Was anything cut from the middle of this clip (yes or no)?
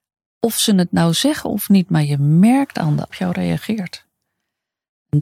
yes